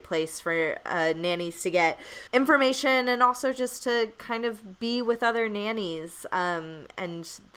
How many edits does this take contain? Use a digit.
1